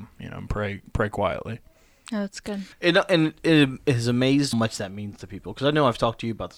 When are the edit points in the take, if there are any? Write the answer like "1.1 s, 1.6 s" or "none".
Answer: 1.9 s, 2.7 s, 4.5 s